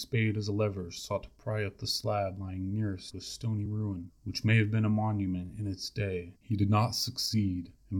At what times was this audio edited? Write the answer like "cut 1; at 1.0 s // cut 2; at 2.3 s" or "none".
none